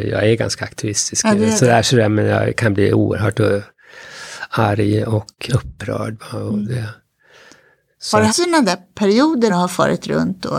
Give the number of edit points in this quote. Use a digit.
3